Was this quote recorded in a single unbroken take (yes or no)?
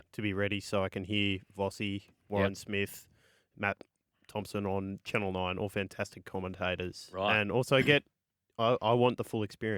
yes